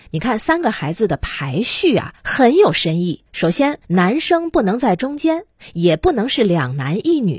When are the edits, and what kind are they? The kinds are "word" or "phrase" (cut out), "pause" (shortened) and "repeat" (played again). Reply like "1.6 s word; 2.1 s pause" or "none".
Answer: 2.2 s pause; 3.3 s pause; 3.8 s pause